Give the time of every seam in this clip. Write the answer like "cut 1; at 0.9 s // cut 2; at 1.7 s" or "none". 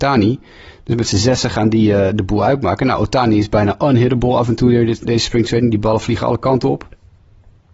cut 1; at 5.0 s